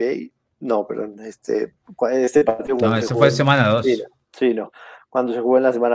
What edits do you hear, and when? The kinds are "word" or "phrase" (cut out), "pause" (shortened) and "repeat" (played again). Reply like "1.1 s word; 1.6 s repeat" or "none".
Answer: none